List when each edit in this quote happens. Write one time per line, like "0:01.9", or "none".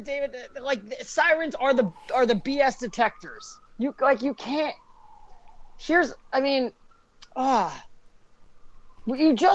0:03.7